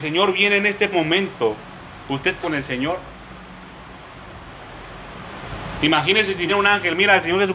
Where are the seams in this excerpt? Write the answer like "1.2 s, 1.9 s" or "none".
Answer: 0.9 s, 2.4 s, 6.5 s